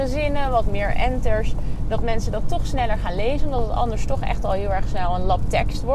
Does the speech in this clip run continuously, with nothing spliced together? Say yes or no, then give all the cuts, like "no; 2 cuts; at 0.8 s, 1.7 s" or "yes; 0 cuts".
yes; 0 cuts